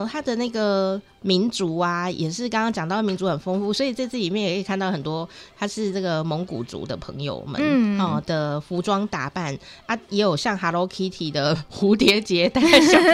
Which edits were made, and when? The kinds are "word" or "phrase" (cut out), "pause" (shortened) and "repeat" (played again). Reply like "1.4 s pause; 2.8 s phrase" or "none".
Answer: none